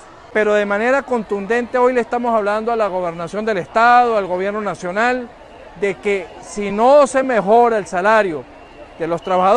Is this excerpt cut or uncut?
uncut